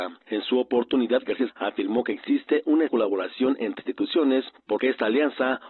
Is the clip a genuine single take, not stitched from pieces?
no; 4 cuts; at 1.5 s, 2.9 s, 3.8 s, 4.8 s

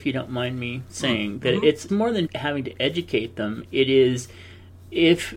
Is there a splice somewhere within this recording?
yes; 2 cuts; at 1.9 s, 2.3 s

